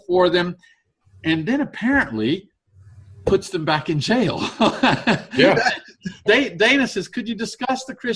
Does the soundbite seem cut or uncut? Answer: cut